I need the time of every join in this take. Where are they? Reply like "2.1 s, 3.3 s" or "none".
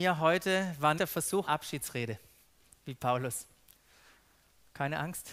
1.0 s, 1.5 s